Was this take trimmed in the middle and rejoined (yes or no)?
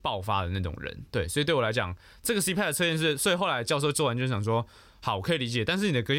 no